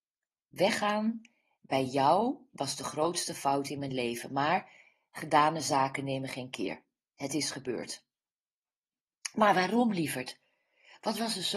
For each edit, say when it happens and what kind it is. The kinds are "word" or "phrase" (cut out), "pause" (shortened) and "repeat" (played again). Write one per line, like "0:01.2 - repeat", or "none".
none